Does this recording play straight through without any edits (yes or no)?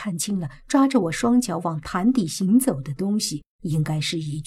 no